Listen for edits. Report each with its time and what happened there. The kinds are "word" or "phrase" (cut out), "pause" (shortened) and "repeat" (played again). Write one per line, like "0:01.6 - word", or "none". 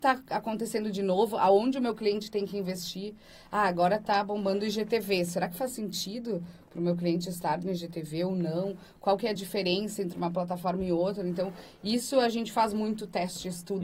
none